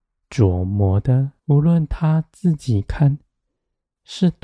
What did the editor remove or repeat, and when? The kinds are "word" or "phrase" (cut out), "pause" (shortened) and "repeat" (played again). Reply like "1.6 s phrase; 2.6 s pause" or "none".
1.4 s pause

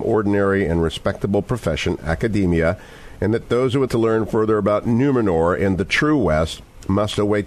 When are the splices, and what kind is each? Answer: 3.9 s word

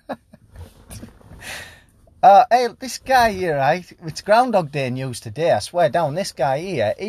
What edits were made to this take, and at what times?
none

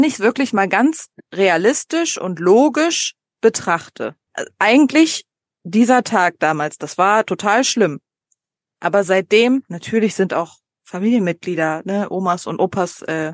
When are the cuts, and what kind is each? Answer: none

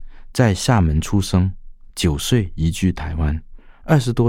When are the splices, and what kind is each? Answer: none

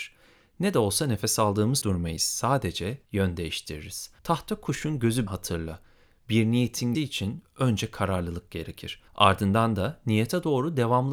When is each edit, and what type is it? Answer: 1.8 s word; 3.1 s pause; 4.2 s pause; 5.3 s word; 6.9 s word; 9.1 s pause

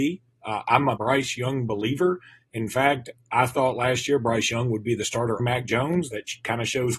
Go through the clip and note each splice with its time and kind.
1.0 s word; 3.2 s word; 5.4 s word

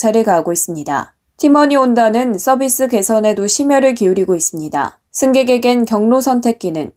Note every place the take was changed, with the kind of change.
1.2 s pause; 5.1 s pause

